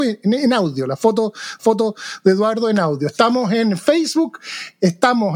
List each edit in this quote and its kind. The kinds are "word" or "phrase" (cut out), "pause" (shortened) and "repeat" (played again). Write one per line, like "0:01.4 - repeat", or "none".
0:01.6 - repeat